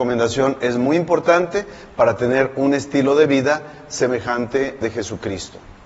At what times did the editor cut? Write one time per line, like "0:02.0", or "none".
0:04.8